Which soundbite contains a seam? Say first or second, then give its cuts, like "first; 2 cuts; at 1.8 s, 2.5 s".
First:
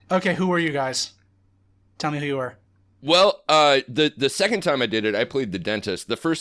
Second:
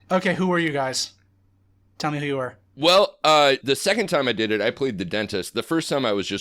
second; 2 cuts; at 2.7 s, 3.6 s